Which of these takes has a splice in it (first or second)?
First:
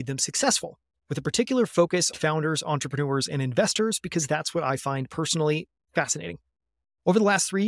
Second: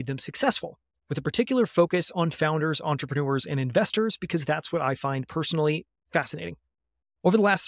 first